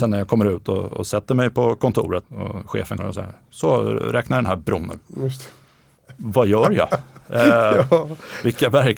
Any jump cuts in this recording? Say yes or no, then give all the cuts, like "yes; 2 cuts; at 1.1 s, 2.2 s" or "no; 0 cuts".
yes; 2 cuts; at 2.2 s, 3.0 s